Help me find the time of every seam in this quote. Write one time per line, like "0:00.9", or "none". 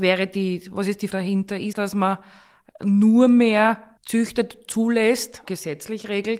0:01.1
0:01.7
0:04.0
0:05.5